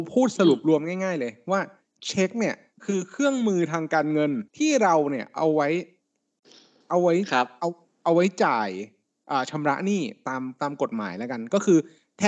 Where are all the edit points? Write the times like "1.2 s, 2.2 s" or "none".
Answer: 4.5 s